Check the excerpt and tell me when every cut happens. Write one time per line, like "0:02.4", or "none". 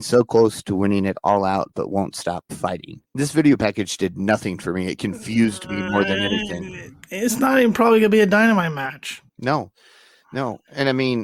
0:03.1
0:07.0
0:09.3